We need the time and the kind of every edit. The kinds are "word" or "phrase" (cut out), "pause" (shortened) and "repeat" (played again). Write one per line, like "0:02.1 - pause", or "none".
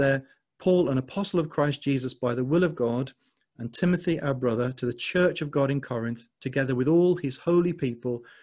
none